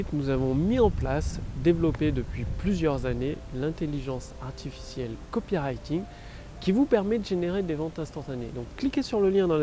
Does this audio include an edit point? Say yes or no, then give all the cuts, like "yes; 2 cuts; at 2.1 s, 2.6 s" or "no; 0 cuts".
no; 0 cuts